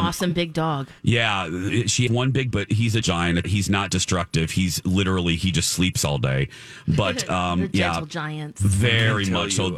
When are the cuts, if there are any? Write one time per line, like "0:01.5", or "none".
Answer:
0:01.0
0:02.1
0:02.5
0:03.0
0:03.4